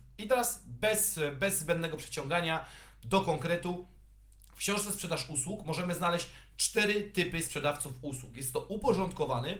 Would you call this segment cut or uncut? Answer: uncut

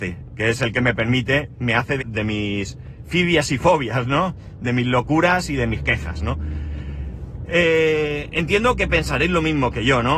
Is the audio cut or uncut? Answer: cut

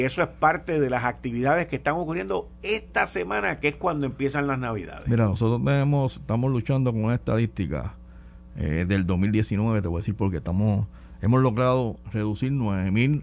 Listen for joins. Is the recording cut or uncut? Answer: uncut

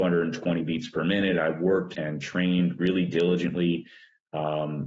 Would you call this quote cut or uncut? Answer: cut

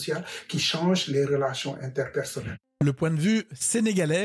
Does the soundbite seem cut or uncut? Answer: uncut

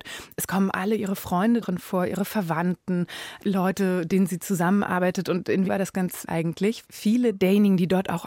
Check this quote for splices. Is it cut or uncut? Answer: cut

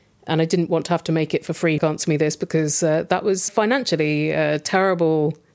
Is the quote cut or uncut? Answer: cut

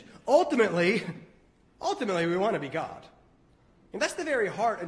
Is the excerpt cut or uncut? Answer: uncut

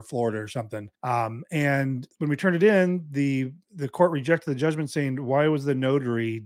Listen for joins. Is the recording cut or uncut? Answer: cut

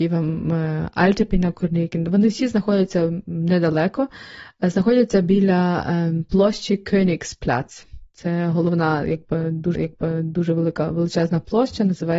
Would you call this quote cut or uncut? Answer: cut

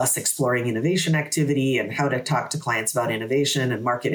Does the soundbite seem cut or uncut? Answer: uncut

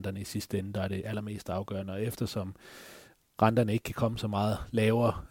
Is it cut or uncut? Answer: uncut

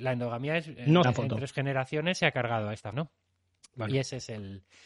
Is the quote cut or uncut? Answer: cut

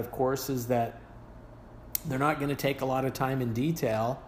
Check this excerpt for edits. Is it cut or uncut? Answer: uncut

